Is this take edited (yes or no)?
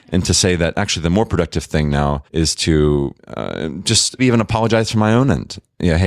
yes